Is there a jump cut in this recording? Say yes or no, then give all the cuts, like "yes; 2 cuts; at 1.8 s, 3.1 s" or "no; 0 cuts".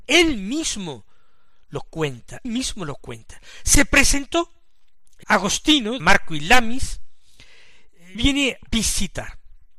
yes; 5 cuts; at 2.4 s, 5.2 s, 6.0 s, 8.1 s, 8.7 s